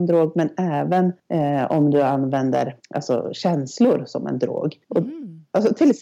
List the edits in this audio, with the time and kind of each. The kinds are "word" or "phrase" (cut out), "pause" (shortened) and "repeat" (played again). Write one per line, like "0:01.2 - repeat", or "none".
0:01.2 - pause
0:02.8 - pause
0:04.8 - pause